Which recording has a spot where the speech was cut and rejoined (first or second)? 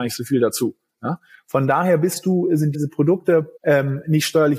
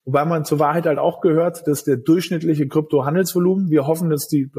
first